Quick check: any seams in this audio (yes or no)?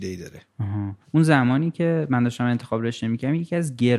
yes